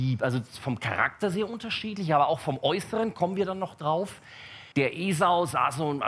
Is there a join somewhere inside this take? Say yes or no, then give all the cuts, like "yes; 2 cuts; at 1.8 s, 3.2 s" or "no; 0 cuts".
yes; 1 cut; at 4.7 s